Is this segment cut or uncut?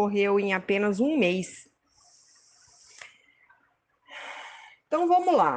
uncut